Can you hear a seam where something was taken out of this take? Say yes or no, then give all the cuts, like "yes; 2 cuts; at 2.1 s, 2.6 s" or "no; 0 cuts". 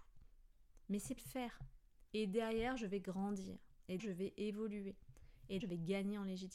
yes; 3 cuts; at 1.2 s, 4.0 s, 5.6 s